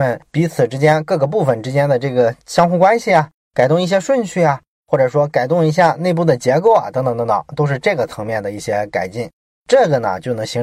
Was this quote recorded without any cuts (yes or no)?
yes